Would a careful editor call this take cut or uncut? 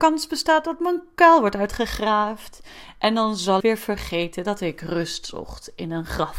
cut